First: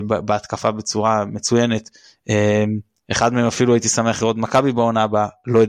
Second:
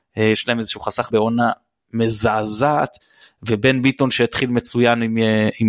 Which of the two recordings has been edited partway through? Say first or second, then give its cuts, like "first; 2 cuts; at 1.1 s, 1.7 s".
second; 1 cut; at 1.1 s